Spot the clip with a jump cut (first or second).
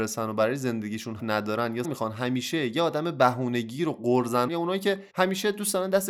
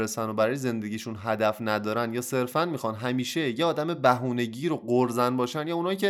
first